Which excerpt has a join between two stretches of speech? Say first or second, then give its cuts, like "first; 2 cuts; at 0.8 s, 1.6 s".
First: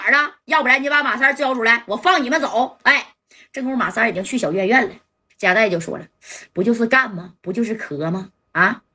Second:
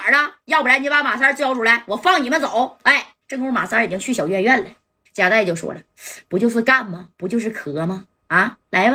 second; 1 cut; at 3.2 s